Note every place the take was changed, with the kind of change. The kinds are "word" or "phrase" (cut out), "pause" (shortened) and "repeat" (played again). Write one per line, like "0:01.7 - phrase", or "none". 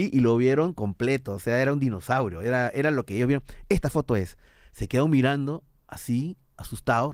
none